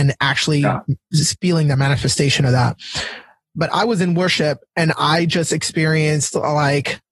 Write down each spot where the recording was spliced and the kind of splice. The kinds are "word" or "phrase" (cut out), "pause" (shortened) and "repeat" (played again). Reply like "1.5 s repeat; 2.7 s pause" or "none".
none